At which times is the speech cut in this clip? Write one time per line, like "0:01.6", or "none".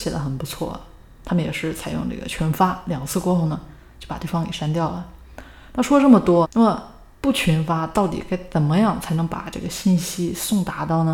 0:06.4